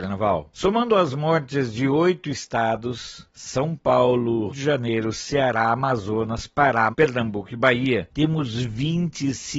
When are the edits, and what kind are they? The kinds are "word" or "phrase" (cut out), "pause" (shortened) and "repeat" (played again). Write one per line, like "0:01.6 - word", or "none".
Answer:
0:04.5 - word
0:06.9 - word